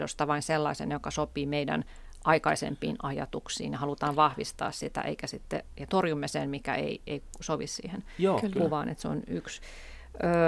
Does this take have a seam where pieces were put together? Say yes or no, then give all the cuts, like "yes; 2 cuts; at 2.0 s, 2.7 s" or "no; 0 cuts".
yes; 1 cut; at 5.9 s